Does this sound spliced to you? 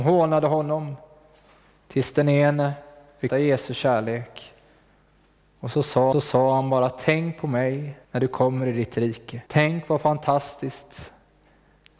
yes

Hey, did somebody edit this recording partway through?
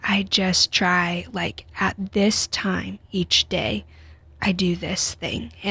no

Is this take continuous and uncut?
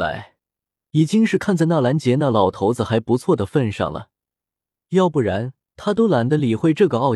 yes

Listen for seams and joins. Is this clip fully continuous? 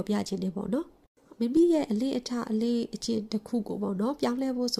yes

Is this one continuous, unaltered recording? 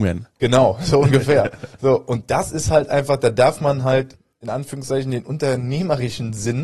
yes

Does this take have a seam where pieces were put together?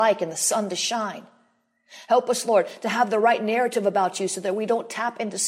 no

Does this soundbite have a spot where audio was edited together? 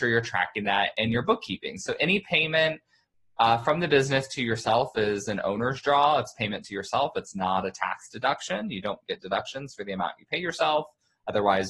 no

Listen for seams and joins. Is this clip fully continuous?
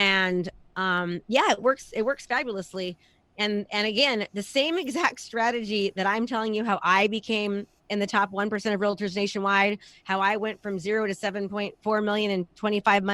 no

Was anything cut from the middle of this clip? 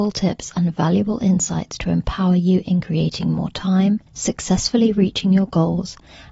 yes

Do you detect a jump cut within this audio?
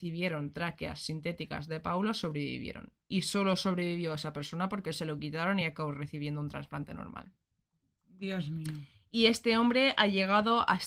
no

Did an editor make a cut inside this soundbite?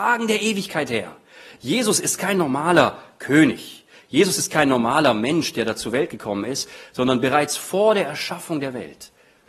no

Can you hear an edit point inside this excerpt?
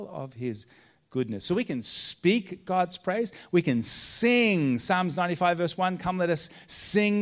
no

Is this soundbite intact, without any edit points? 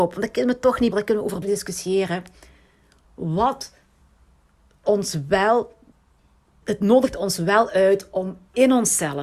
no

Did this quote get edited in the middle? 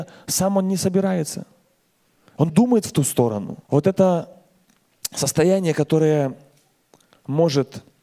yes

